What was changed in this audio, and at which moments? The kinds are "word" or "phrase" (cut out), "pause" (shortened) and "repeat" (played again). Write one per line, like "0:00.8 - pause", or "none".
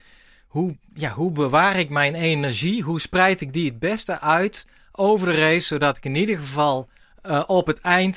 0:07.0 - pause